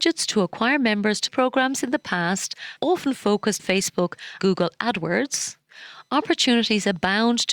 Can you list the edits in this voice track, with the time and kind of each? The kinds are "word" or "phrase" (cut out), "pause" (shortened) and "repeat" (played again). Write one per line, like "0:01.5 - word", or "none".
0:01.3 - word
0:02.8 - word
0:03.6 - word
0:04.4 - word

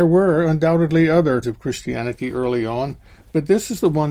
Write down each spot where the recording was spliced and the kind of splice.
0:01.4 - word

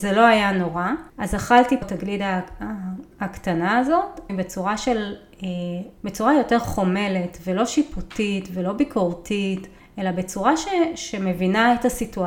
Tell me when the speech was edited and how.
0:01.1 - pause
0:01.8 - word
0:03.1 - pause
0:04.3 - phrase
0:06.0 - pause
0:09.8 - pause

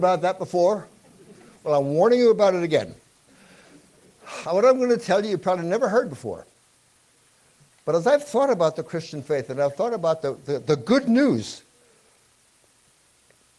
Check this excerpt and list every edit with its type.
none

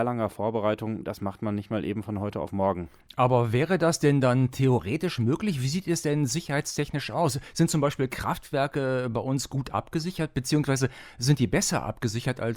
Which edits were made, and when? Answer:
none

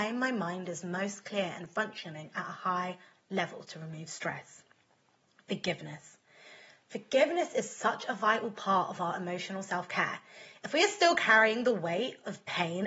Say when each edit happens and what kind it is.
none

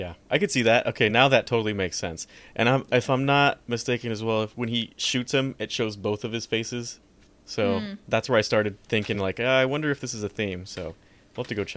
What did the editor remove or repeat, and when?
none

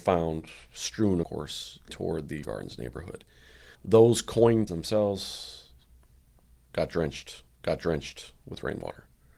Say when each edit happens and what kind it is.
0:01.2 - phrase
0:01.9 - word
0:02.4 - word
0:03.7 - pause
0:04.7 - word
0:07.5 - repeat

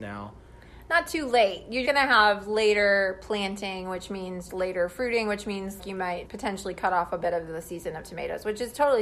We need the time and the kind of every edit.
0:01.8 - word
0:04.5 - word
0:05.8 - word
0:06.2 - word

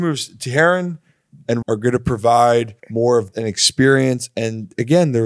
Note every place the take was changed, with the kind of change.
0:01.6 - word
0:02.8 - pause
0:03.3 - word

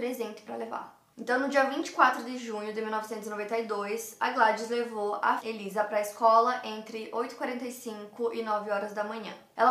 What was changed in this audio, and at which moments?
0:05.4 - word

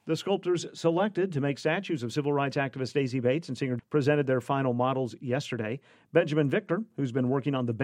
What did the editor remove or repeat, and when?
0:03.8 - phrase

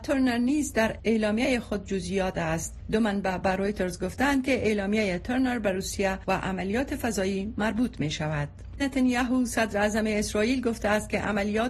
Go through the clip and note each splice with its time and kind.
0:02.3 - word
0:08.8 - word

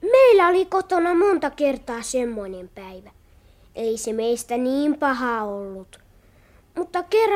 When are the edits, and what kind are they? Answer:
none

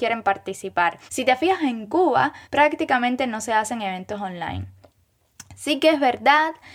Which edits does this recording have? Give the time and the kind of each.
0:01.1 - pause
0:02.4 - pause

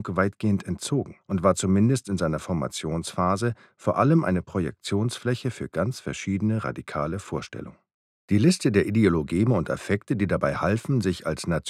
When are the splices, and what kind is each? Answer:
0:01.2 - pause
0:08.0 - pause

